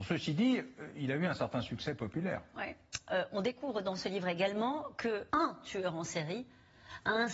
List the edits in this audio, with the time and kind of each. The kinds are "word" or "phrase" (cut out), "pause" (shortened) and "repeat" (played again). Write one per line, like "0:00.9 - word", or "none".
0:05.3 - pause